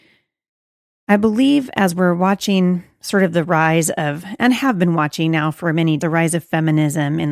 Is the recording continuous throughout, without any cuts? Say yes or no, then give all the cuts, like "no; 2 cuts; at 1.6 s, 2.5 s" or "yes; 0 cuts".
no; 1 cut; at 6.0 s